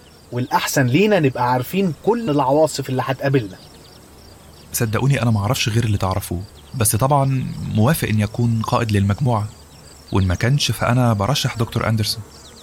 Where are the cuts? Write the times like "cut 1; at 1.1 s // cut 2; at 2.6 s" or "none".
cut 1; at 2.3 s // cut 2; at 6.5 s